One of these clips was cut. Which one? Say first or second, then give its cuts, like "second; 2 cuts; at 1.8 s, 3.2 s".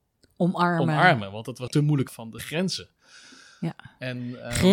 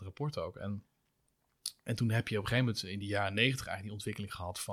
first; 3 cuts; at 1.7 s, 2.1 s, 2.4 s